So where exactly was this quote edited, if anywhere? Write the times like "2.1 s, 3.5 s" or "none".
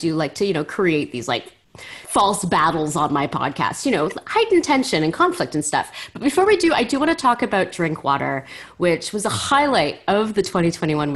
2.0 s